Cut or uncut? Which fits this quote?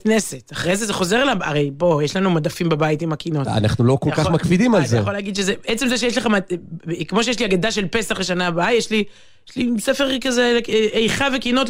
uncut